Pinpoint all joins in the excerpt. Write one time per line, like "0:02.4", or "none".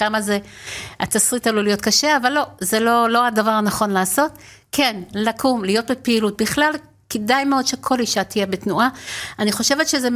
none